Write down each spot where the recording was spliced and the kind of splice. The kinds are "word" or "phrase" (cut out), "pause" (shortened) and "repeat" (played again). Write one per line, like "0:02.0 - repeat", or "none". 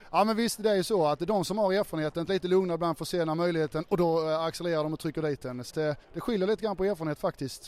0:02.3 - phrase
0:05.7 - word
0:06.0 - pause

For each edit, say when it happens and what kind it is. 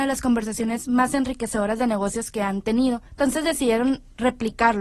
0:03.1 - pause

